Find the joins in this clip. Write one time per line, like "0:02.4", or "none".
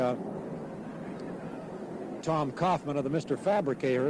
0:02.2